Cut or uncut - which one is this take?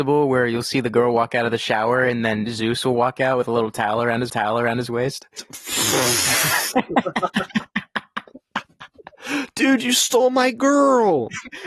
cut